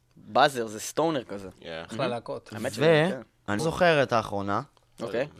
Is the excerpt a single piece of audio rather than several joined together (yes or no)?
no